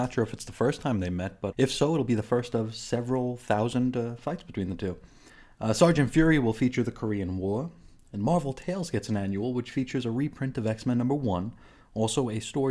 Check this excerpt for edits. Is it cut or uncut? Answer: cut